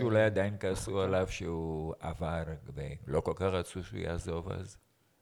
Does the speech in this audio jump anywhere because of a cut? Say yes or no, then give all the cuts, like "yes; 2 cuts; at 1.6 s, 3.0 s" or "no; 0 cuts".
no; 0 cuts